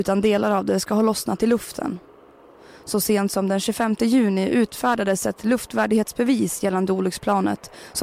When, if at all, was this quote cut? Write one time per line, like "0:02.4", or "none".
none